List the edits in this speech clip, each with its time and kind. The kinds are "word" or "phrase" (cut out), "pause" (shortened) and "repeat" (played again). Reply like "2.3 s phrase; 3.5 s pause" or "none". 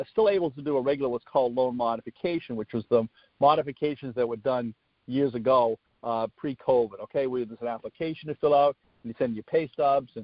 none